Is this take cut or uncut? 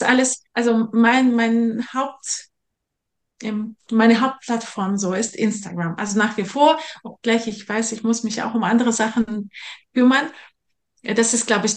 uncut